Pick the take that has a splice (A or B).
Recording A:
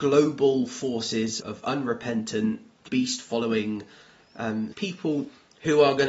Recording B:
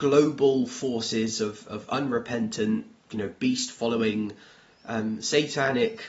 A